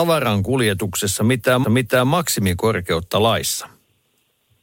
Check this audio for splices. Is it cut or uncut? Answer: cut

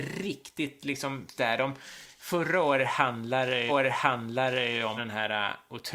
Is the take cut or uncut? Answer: cut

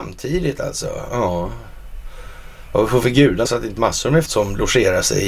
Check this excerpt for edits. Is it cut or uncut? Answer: cut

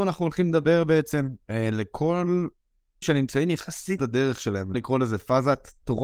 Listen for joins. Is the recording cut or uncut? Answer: cut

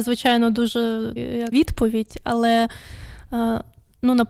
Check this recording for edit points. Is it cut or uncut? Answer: cut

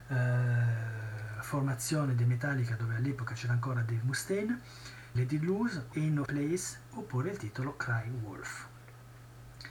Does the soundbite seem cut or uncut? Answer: cut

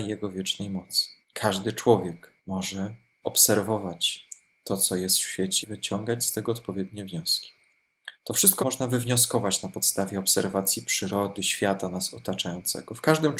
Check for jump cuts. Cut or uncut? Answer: cut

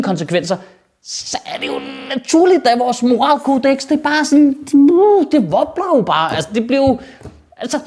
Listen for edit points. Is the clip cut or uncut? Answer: uncut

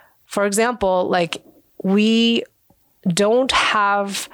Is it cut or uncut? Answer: uncut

